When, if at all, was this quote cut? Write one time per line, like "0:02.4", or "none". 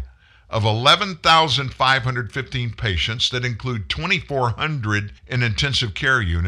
0:05.2

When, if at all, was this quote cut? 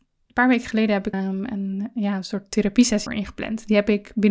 0:01.1
0:03.1

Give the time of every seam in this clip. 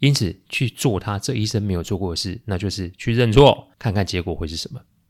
0:03.7

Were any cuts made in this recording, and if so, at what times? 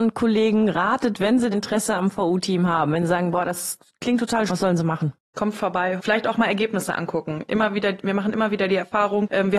0:01.5
0:04.5
0:06.0

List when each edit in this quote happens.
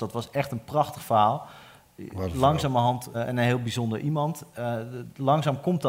0:03.1

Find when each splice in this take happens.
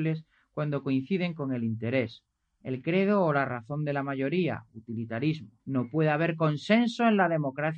0:05.6

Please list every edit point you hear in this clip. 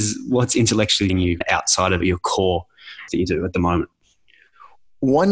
0:01.1
0:01.4
0:02.0
0:03.1

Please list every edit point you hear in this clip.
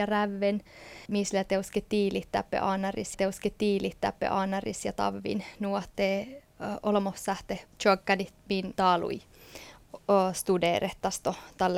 0:01.1
0:03.1
0:07.7
0:08.8

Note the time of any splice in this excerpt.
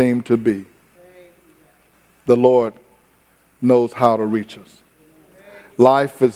none

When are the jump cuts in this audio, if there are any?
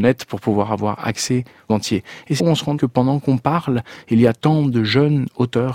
0:01.7
0:02.4
0:02.8

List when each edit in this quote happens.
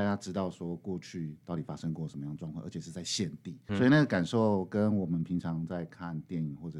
0:03.7

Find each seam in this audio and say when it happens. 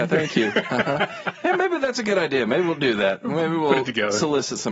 none

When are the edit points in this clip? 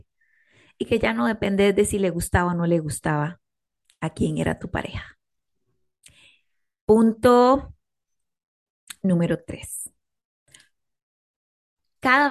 0:09.0

